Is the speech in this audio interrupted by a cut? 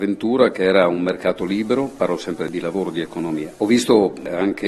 no; 0 cuts

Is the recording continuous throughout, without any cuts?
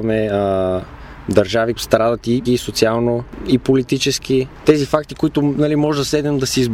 no; 2 cuts; at 1.8 s, 2.5 s

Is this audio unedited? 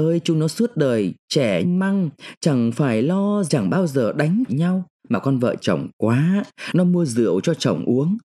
no; 4 cuts; at 1.6 s, 3.5 s, 4.5 s, 5.6 s

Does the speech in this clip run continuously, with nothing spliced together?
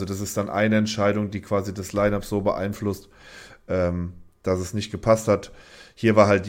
yes; 0 cuts

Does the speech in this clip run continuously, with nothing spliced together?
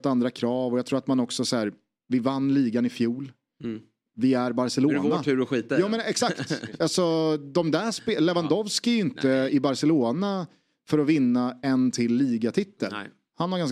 yes; 0 cuts

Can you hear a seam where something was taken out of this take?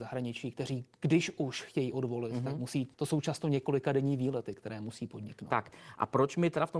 yes; 1 cut; at 2.9 s

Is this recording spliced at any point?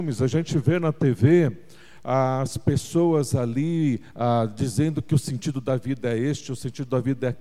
no; 0 cuts

